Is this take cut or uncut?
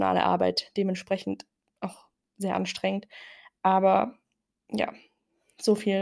uncut